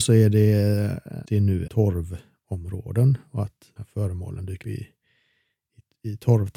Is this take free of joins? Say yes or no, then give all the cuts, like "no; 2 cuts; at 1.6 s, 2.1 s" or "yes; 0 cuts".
no; 4 cuts; at 1.2 s, 1.7 s, 3.8 s, 4.6 s